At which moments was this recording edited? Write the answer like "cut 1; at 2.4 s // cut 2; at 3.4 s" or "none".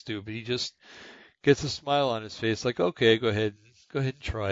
none